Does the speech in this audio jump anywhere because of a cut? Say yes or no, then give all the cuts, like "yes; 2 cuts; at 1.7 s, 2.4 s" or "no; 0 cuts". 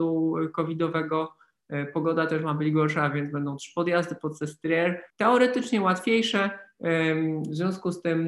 yes; 1 cut; at 5.1 s